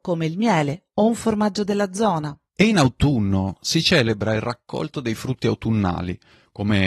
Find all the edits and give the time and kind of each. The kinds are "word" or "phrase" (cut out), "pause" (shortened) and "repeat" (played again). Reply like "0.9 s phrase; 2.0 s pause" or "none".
none